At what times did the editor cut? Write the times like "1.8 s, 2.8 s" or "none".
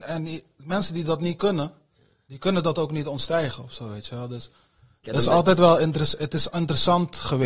none

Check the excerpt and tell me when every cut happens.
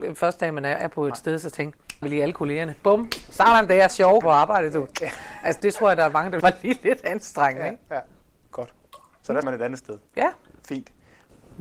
2.0 s, 3.9 s, 4.2 s, 5.6 s, 6.4 s, 9.4 s

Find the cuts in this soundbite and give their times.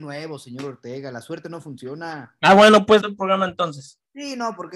3.0 s

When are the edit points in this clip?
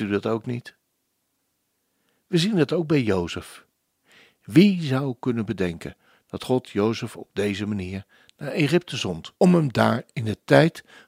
9.4 s

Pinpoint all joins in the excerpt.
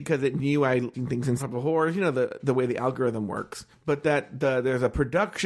0.9 s, 1.4 s, 3.7 s

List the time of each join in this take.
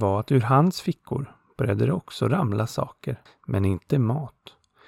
3.3 s

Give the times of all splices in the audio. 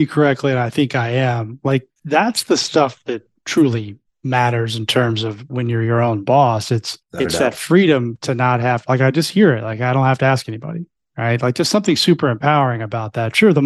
2.0 s, 7.0 s

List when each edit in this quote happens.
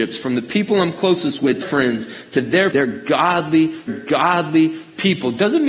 1.6 s, 2.7 s, 3.9 s

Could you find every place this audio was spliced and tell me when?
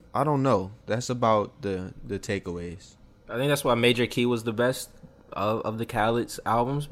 none

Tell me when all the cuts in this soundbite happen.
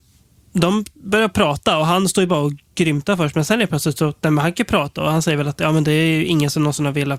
none

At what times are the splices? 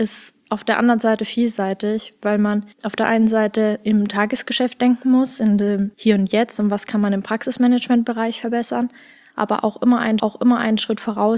2.7 s, 5.9 s, 10.2 s

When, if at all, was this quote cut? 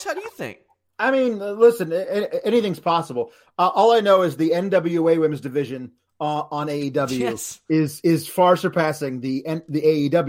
none

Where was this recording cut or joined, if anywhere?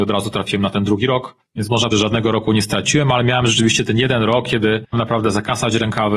1.4 s, 1.9 s, 4.9 s

